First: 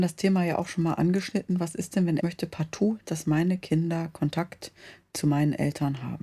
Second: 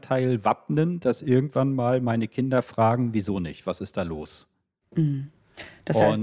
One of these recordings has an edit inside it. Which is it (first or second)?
first